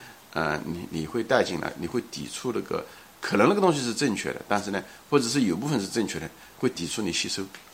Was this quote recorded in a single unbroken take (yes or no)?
yes